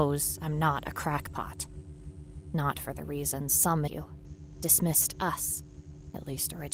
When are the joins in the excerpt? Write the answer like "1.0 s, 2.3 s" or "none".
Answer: 3.9 s